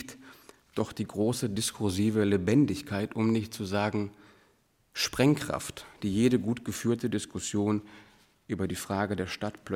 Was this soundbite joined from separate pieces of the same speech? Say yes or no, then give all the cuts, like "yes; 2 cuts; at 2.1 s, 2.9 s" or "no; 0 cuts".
no; 0 cuts